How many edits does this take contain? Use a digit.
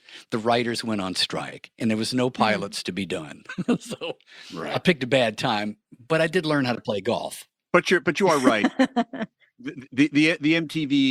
0